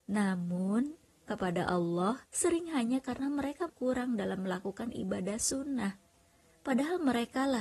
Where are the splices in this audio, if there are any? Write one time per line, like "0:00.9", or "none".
0:01.3
0:02.2
0:03.7